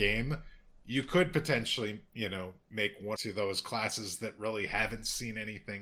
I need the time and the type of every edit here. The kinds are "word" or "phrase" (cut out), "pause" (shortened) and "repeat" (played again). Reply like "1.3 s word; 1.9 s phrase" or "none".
3.2 s phrase